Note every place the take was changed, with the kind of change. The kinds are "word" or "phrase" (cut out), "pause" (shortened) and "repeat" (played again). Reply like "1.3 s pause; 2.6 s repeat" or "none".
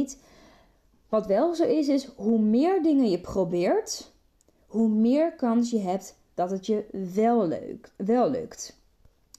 none